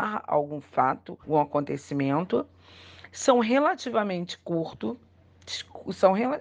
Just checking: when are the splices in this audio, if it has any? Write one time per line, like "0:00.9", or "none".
0:01.2